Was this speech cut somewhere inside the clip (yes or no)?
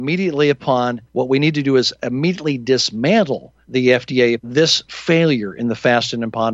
yes